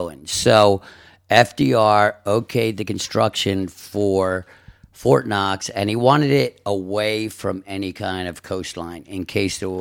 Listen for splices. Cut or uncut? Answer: uncut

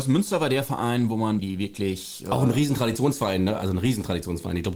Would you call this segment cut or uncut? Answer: cut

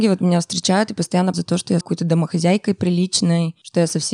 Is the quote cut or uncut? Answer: cut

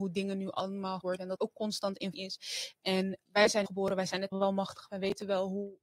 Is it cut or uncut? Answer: cut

